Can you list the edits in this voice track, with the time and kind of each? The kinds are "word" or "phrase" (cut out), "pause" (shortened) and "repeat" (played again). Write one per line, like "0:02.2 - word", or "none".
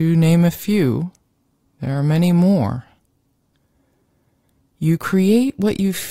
none